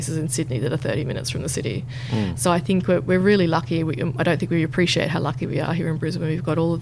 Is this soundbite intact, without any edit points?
yes; 0 cuts

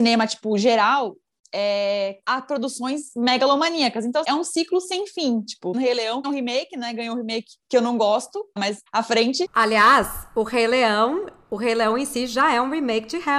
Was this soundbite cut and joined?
yes; 7 cuts; at 2.2 s, 4.2 s, 5.7 s, 6.2 s, 7.6 s, 8.6 s, 8.9 s

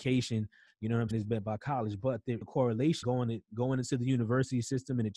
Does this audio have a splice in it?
yes; 3 cuts; at 1.1 s, 2.4 s, 3.0 s

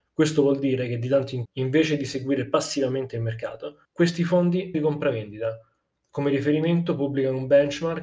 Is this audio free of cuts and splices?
no; 3 cuts; at 1.4 s, 3.8 s, 4.7 s

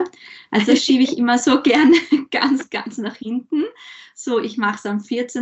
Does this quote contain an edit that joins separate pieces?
no; 0 cuts

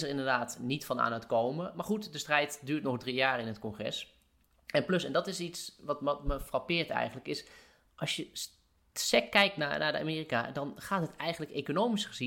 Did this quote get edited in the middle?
no; 0 cuts

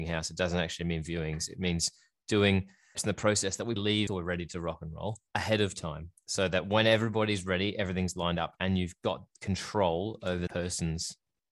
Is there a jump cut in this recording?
yes; 5 cuts; at 2.9 s, 3.8 s, 4.1 s, 5.3 s, 10.5 s

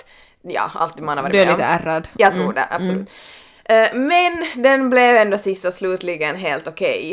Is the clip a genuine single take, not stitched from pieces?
yes; 0 cuts

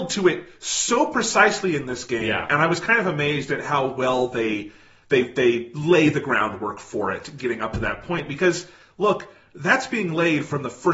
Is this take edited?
no; 0 cuts

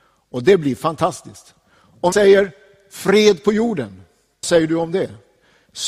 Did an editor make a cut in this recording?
yes; 2 cuts; at 2.1 s, 4.4 s

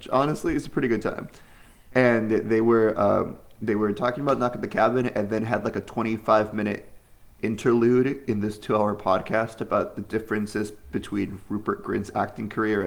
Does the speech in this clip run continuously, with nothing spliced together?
yes; 0 cuts

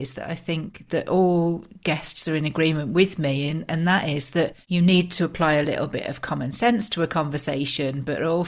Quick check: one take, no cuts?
yes; 0 cuts

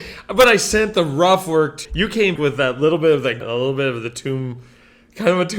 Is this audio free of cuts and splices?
no; 3 cuts; at 1.8 s, 2.4 s, 3.4 s

